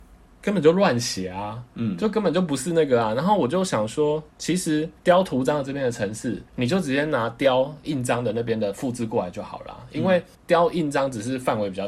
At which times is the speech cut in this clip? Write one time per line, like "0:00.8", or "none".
0:01.7
0:04.3
0:05.0
0:06.5
0:10.3